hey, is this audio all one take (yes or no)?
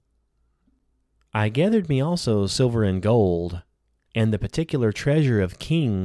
yes